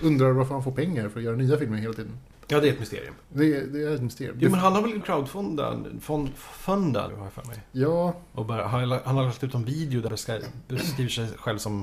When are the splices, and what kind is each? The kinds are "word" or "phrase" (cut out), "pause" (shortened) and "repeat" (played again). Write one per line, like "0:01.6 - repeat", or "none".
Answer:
0:03.2 - pause
0:05.0 - word
0:07.1 - phrase
0:10.1 - word